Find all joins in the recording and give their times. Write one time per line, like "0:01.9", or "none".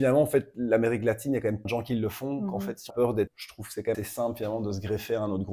0:01.6
0:02.9
0:03.3
0:03.9